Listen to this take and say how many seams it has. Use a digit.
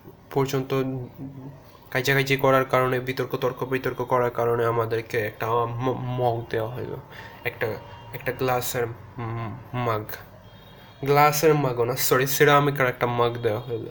0